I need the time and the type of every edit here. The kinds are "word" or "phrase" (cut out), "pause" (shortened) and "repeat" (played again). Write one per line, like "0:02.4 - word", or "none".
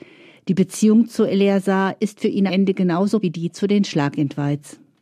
0:02.5 - word
0:03.2 - word